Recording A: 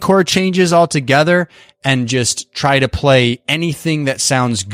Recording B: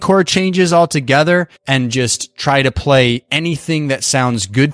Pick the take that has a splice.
B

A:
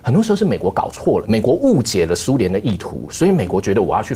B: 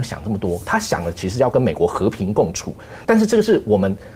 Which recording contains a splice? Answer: B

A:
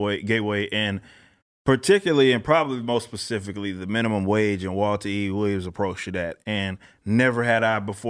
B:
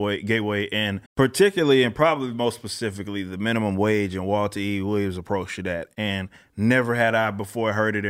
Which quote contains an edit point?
B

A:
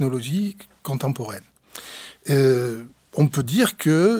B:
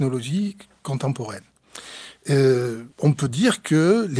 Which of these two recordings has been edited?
B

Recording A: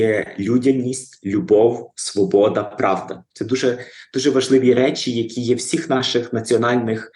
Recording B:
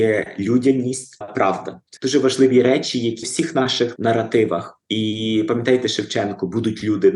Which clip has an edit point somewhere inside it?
B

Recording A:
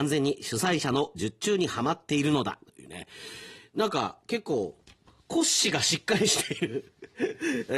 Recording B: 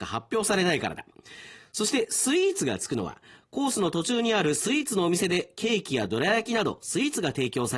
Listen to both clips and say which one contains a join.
A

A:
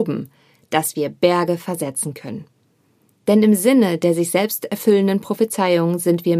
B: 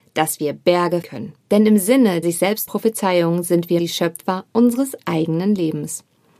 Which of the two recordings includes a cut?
B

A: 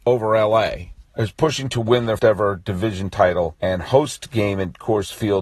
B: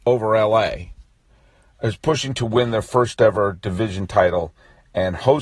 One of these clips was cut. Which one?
A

